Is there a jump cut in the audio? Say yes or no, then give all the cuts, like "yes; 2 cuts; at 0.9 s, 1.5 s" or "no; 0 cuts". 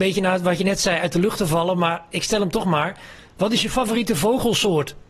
no; 0 cuts